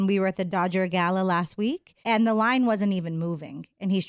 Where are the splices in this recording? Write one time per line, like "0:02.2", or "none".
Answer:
0:02.0